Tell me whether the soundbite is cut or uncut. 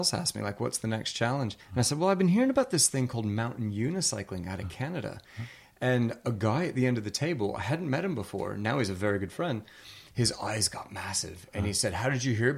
cut